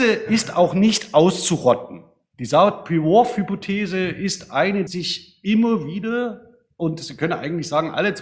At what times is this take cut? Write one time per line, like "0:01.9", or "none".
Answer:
0:04.9